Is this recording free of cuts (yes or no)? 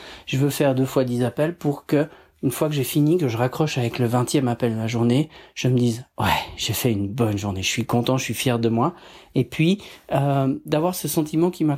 yes